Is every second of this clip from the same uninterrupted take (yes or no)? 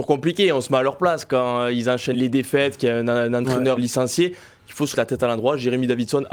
no